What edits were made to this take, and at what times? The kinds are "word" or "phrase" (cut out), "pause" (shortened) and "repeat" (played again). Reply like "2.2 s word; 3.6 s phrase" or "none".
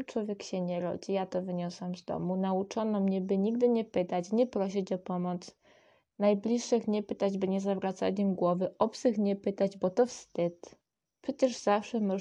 none